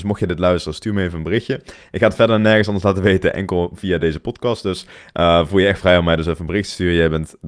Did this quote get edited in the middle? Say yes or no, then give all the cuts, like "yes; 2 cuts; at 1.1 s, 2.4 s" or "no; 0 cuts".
no; 0 cuts